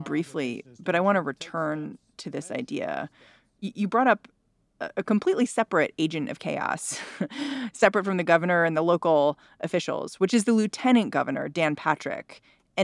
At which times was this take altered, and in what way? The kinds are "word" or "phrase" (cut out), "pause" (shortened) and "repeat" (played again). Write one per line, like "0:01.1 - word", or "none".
none